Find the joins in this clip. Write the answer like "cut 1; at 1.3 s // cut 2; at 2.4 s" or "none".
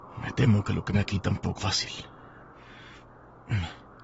cut 1; at 0.9 s // cut 2; at 1.6 s